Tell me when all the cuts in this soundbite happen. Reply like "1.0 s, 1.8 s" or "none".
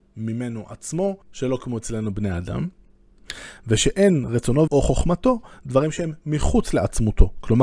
1.2 s, 4.7 s